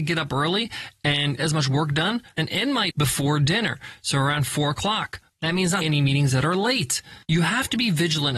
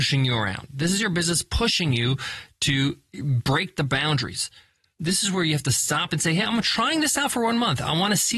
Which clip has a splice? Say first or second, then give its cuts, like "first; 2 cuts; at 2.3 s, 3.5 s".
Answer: first; 5 cuts; at 1.4 s, 2.4 s, 2.9 s, 5.8 s, 7.2 s